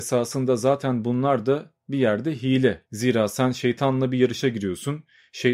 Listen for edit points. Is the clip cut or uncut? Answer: cut